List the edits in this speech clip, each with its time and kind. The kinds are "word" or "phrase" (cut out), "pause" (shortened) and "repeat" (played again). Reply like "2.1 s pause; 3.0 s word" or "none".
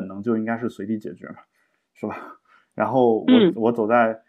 none